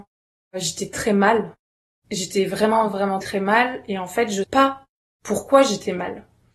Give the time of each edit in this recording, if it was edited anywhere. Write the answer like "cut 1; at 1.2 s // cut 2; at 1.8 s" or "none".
cut 1; at 0.9 s // cut 2; at 1.6 s // cut 3; at 3.2 s // cut 4; at 4.4 s